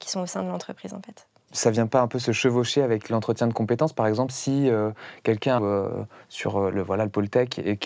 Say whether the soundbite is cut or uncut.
cut